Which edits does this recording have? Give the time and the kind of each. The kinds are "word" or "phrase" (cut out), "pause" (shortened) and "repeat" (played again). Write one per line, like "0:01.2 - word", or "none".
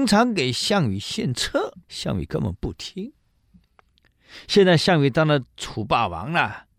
0:01.8 - pause

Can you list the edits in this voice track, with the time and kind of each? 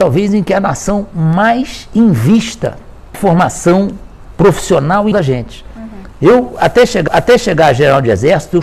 0:03.1 - word
0:05.1 - word
0:07.1 - repeat

